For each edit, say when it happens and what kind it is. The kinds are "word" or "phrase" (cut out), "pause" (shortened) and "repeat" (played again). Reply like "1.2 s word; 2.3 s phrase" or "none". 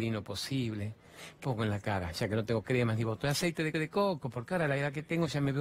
1.4 s word; 3.7 s repeat

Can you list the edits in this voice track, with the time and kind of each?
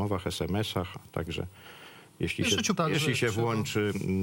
2.8 s word

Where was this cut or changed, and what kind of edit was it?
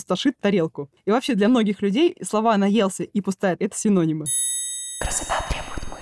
3.6 s word

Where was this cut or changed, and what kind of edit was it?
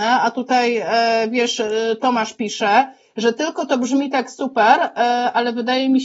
none

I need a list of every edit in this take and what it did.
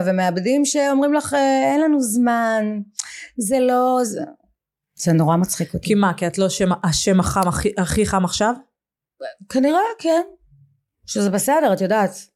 4.8 s pause

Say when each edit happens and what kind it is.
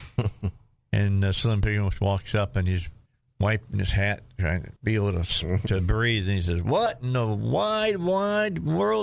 3.1 s pause; 4.8 s pause

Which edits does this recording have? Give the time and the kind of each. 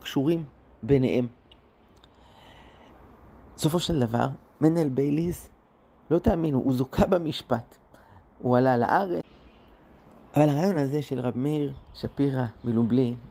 none

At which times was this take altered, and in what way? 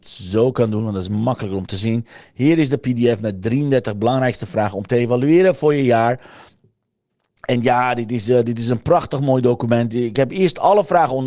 none

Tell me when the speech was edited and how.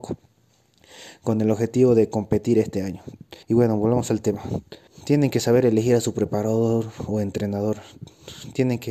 3.4 s pause; 4.9 s pause

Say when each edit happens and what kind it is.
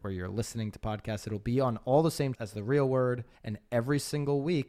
2.3 s word; 3.3 s pause

